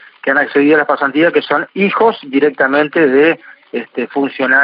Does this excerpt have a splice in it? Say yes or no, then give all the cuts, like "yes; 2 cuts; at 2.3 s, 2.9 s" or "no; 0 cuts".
no; 0 cuts